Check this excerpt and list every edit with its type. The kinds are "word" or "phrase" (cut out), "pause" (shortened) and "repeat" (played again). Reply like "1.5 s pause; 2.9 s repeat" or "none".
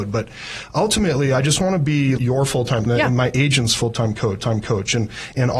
2.2 s word; 2.9 s phrase; 4.4 s repeat